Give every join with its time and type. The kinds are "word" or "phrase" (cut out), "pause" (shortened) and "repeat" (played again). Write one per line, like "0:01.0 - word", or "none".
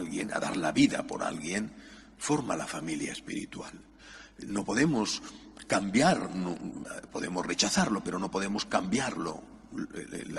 none